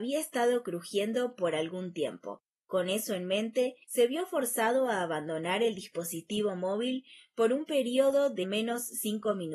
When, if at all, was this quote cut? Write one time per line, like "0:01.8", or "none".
0:02.5
0:03.8
0:08.4